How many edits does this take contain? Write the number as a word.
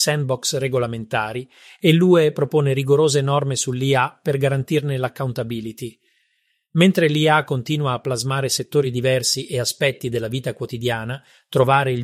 zero